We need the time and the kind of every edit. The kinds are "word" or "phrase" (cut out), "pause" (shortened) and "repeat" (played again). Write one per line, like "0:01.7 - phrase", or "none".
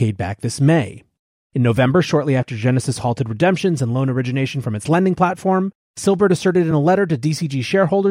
none